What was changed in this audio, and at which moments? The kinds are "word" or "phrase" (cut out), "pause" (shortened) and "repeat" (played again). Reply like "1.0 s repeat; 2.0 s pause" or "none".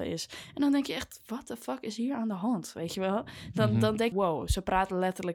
4.1 s phrase